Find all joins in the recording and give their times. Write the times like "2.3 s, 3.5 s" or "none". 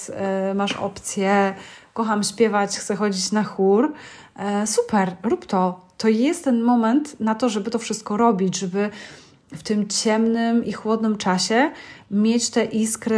none